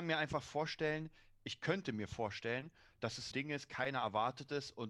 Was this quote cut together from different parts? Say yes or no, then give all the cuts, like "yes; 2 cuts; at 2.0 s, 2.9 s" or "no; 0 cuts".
yes; 1 cut; at 3.3 s